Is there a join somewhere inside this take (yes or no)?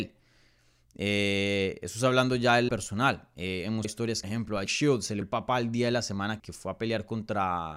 yes